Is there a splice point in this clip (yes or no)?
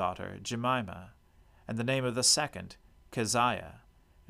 no